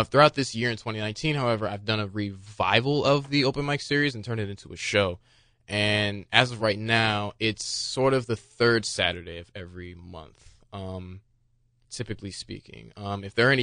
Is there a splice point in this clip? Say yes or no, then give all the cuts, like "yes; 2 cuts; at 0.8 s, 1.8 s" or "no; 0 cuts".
no; 0 cuts